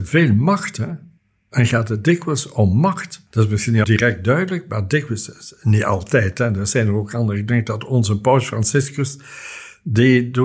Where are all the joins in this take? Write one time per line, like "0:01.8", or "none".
0:01.2
0:03.8